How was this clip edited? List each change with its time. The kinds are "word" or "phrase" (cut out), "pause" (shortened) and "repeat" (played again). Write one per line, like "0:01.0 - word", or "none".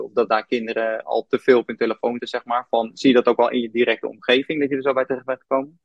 0:02.2 - word

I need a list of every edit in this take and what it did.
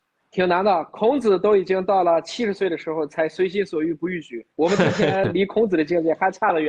0:04.5 - pause

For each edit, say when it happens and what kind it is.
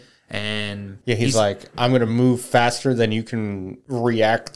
none

